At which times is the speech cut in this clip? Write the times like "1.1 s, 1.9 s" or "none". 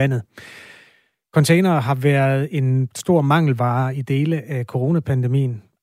none